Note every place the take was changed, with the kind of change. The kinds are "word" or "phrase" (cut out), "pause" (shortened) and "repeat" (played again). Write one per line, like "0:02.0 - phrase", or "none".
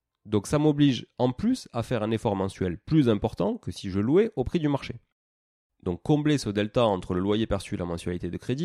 none